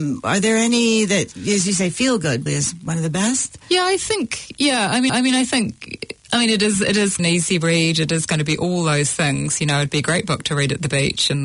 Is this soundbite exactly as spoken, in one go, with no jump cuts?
no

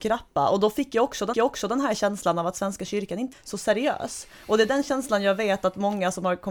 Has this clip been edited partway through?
yes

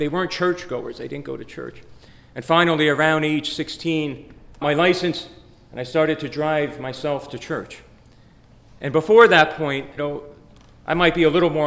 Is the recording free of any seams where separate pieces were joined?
no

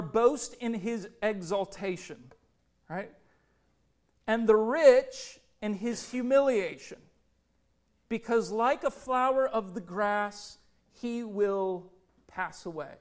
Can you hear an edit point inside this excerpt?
no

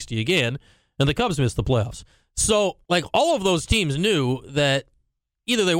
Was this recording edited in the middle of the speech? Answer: yes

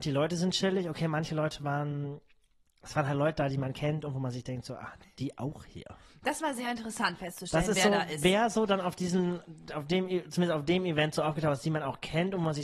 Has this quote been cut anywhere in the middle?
no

